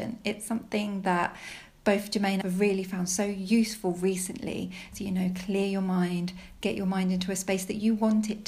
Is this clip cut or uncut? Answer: cut